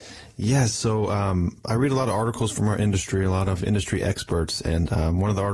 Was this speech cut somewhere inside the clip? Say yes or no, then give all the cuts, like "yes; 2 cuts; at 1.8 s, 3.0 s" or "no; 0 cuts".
no; 0 cuts